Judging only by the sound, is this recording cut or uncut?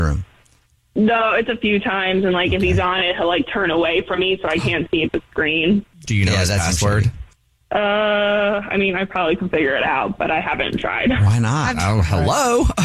cut